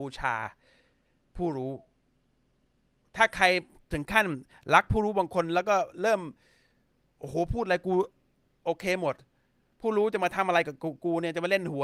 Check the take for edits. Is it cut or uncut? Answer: uncut